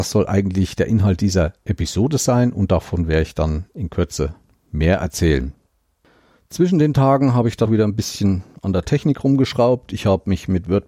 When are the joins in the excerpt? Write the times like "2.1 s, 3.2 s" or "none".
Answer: 7.7 s